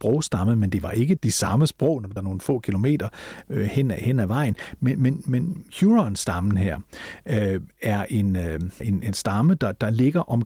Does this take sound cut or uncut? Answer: cut